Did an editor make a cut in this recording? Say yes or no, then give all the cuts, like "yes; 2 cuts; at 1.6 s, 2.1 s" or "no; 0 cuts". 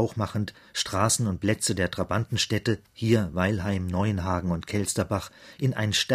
no; 0 cuts